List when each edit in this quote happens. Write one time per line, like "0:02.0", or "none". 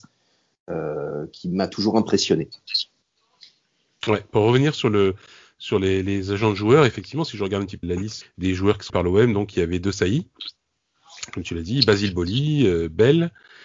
0:07.8
0:08.2
0:08.9